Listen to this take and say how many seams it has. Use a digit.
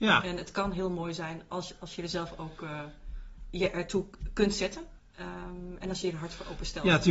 1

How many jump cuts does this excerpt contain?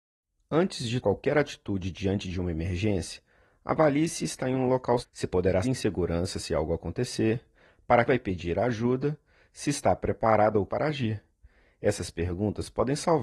5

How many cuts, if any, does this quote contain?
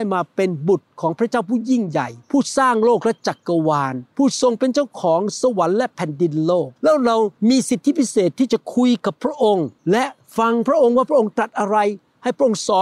3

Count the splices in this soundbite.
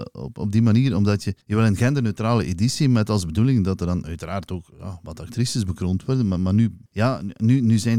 2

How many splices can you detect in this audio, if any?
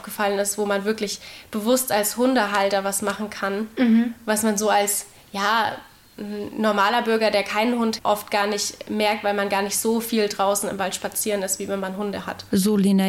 1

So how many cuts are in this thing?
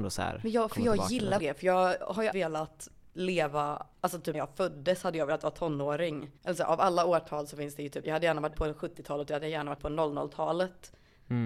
8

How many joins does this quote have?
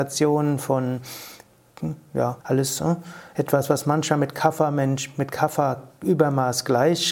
1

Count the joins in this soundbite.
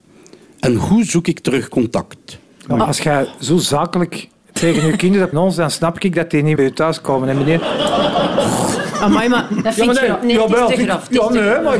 2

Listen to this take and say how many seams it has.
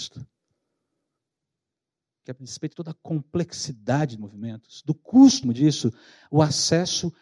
4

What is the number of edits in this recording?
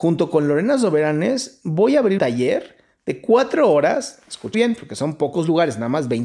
2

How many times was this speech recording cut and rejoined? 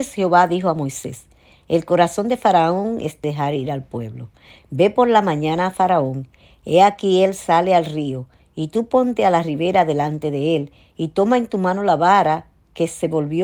1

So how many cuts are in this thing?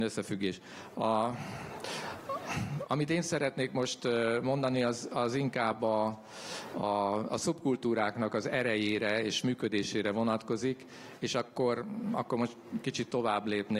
0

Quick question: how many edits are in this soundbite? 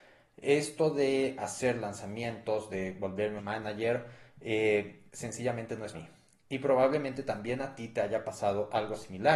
3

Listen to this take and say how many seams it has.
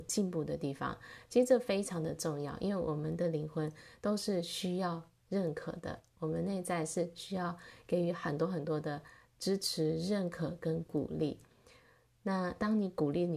0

